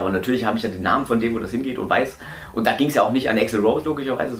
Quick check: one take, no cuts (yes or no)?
yes